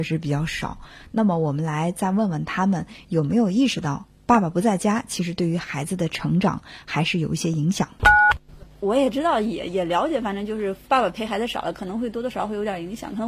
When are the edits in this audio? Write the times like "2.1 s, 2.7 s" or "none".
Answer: 10.8 s